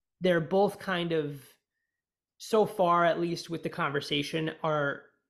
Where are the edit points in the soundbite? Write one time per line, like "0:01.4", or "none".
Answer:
none